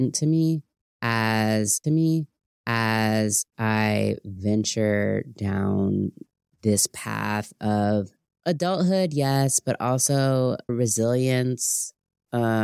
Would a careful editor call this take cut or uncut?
cut